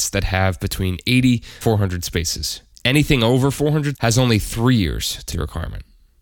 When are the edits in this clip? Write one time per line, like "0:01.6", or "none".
0:01.6
0:02.7
0:03.9
0:05.3